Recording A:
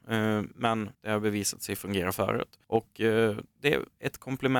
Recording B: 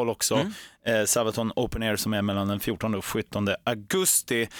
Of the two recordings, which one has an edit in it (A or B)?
A